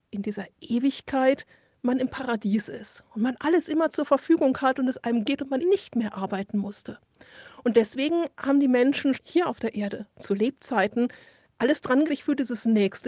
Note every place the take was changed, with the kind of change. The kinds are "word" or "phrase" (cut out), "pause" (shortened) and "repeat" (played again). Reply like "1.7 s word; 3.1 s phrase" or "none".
5.2 s word; 5.6 s word; 9.1 s word; 12.1 s word